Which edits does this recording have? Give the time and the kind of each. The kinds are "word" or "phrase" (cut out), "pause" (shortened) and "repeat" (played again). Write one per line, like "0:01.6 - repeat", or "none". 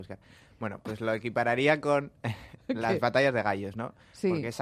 none